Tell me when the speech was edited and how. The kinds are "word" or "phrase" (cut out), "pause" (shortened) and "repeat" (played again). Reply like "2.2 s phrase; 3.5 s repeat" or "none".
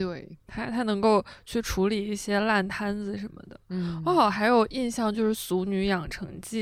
none